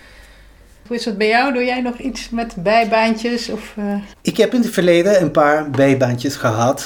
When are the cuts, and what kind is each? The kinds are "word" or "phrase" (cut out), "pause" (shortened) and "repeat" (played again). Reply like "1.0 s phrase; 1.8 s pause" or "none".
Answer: 4.1 s pause